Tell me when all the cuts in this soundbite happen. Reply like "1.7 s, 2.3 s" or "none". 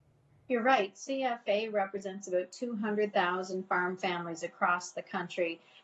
none